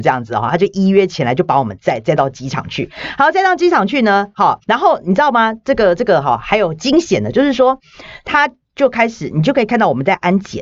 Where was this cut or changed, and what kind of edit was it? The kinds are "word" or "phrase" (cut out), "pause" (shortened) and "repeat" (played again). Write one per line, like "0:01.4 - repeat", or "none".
0:04.6 - pause